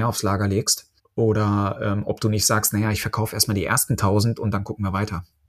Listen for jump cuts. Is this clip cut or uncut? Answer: cut